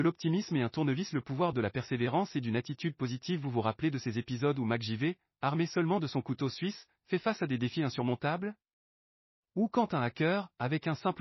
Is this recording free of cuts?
yes; 0 cuts

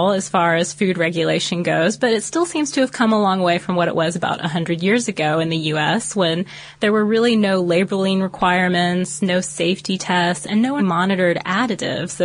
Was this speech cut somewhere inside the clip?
yes; 1 cut; at 10.8 s

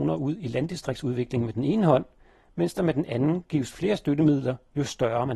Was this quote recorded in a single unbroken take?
yes; 0 cuts

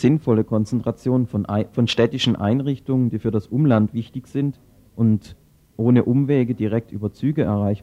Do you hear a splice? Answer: no; 0 cuts

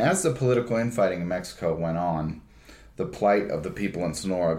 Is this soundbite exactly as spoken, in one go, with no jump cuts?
yes; 0 cuts

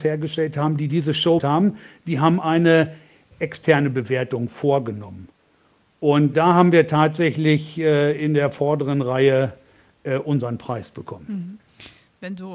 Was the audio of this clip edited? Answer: yes; 4 cuts; at 1.4 s, 3.3 s, 6.3 s, 8.2 s

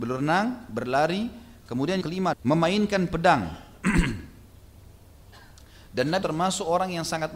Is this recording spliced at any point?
yes; 3 cuts; at 2.0 s, 2.3 s, 6.2 s

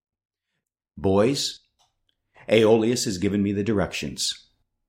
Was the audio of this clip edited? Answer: no; 0 cuts

